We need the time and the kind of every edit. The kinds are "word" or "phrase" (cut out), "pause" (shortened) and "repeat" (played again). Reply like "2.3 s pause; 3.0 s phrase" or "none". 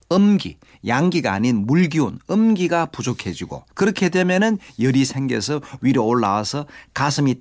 3.7 s pause